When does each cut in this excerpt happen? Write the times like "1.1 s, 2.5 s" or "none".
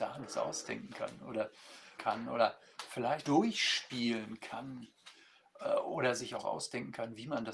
2.0 s, 3.2 s